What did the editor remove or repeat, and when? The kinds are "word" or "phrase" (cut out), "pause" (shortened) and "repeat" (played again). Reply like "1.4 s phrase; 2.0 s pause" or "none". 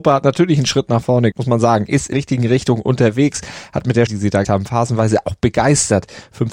1.3 s word; 2.1 s word; 4.1 s word; 4.4 s word